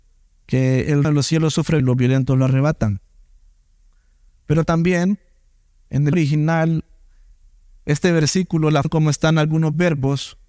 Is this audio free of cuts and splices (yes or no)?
no